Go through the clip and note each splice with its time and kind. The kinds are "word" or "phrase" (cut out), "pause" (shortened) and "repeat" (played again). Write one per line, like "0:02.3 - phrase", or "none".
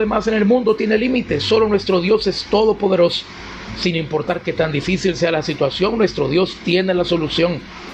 none